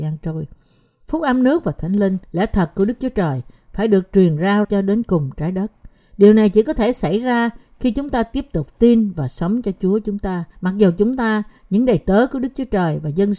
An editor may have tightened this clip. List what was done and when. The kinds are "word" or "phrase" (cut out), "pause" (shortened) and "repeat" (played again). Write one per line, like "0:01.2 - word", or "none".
0:02.2 - pause
0:04.6 - word
0:10.5 - pause